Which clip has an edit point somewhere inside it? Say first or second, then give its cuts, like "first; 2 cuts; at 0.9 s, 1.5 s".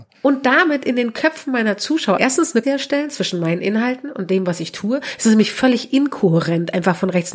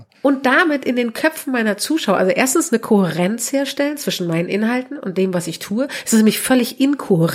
first; 2 cuts; at 2.2 s, 2.6 s